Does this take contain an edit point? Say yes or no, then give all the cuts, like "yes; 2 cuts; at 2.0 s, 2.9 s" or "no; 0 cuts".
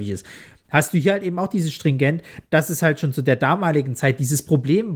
no; 0 cuts